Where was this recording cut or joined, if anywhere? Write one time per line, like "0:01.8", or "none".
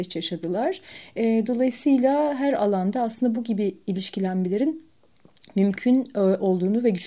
none

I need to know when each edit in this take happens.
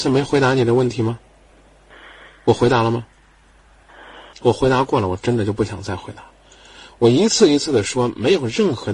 0:04.3

